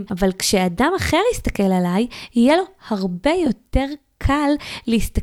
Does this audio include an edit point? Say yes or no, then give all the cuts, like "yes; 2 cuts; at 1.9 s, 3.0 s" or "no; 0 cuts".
no; 0 cuts